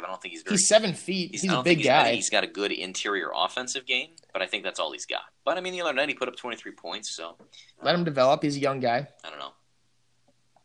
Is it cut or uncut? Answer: cut